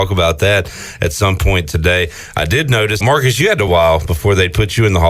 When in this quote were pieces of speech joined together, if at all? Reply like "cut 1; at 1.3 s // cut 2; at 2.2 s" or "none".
cut 1; at 3.0 s // cut 2; at 3.7 s